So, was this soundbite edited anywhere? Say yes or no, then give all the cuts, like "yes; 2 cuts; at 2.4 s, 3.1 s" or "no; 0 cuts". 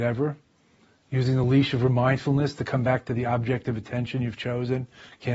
no; 0 cuts